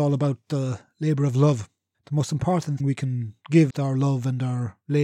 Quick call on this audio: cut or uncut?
cut